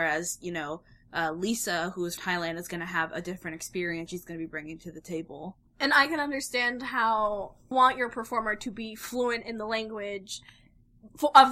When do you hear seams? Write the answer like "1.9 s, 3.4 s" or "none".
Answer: 2.2 s, 4.1 s, 5.7 s, 7.7 s